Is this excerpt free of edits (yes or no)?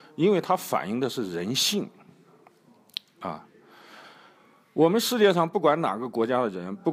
yes